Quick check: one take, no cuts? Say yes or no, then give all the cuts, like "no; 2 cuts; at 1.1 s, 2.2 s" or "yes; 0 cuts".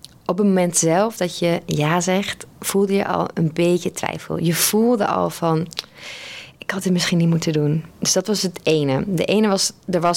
no; 2 cuts; at 2.5 s, 7.9 s